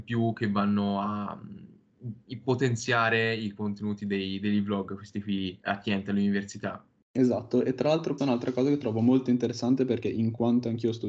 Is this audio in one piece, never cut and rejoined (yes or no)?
no